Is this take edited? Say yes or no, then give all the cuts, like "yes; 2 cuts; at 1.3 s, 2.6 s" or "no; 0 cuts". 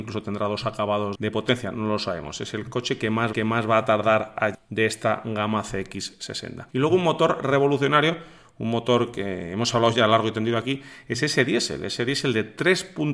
yes; 4 cuts; at 1.1 s, 3.3 s, 4.5 s, 6.7 s